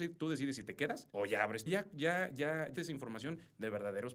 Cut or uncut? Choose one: cut